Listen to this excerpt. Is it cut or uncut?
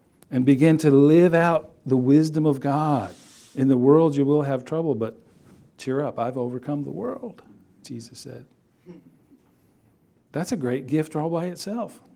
uncut